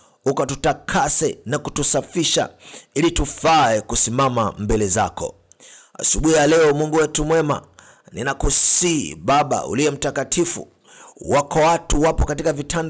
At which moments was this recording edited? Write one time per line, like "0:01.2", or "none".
none